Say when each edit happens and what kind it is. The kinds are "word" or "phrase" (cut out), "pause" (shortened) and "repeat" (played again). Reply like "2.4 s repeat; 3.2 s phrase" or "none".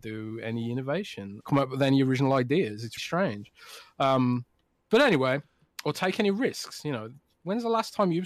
1.4 s word; 3.0 s word

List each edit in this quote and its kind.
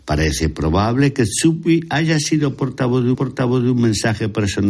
3.1 s repeat

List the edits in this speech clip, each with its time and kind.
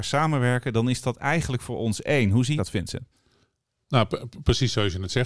2.6 s word

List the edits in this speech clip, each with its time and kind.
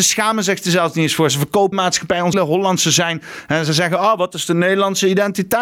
1.7 s phrase; 2.3 s word

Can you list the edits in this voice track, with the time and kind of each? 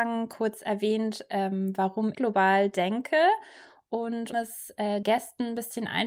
2.1 s word; 4.3 s word; 5.0 s word

